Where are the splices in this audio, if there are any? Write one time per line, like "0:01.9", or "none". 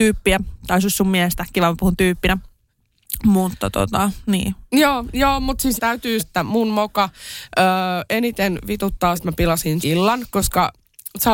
0:05.8
0:06.2
0:09.2
0:09.8